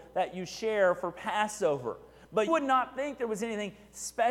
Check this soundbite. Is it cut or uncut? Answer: cut